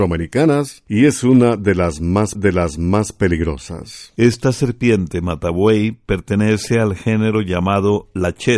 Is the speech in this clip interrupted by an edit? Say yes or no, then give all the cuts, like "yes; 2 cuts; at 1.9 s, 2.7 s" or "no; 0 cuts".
yes; 1 cut; at 2.3 s